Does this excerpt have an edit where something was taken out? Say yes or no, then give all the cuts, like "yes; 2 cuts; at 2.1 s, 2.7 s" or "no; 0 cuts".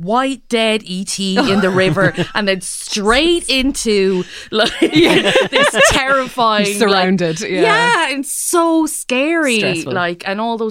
no; 0 cuts